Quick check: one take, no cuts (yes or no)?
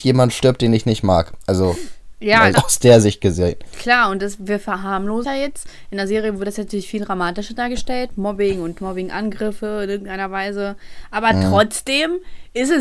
no